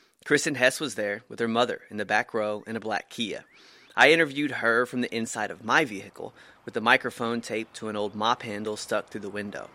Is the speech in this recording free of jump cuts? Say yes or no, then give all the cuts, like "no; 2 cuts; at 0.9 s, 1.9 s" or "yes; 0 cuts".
yes; 0 cuts